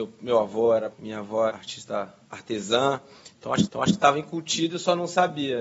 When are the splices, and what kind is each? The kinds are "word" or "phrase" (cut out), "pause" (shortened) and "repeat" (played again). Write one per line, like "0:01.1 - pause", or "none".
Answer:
0:00.9 - word
0:01.5 - word
0:03.7 - repeat

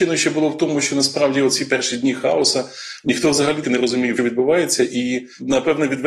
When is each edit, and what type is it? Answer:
0:03.6 - word
0:04.2 - word

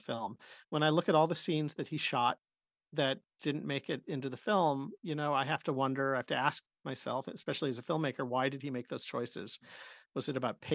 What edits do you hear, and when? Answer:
none

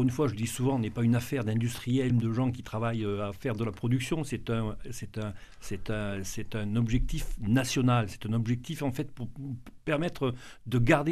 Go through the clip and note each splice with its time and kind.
0:02.1 - phrase

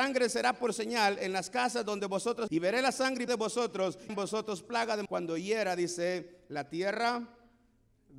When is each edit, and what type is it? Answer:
0:02.5 - word
0:03.3 - word
0:04.1 - phrase
0:05.1 - word

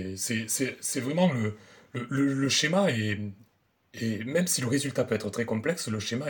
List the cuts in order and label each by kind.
none

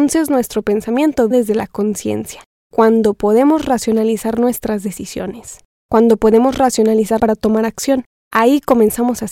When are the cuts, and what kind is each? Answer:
0:01.3 - word
0:07.2 - phrase

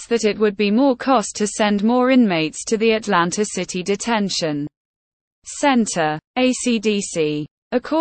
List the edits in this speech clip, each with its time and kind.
0:01.3 - word
0:06.3 - pause

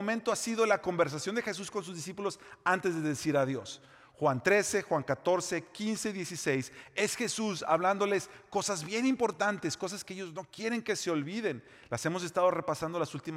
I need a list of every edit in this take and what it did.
none

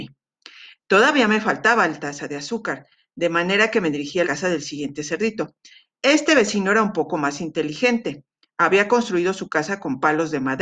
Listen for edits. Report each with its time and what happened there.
0:04.2 - word

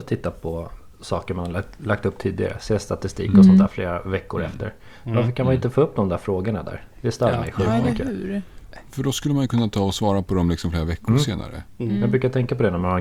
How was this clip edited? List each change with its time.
none

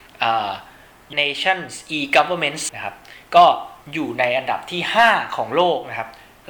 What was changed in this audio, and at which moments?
0:01.1 - word
0:02.7 - word
0:03.8 - pause

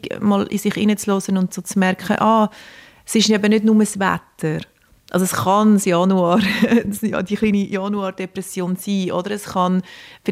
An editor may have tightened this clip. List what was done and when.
none

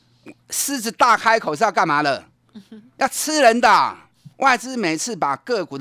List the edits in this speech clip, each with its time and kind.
0:04.3 - pause

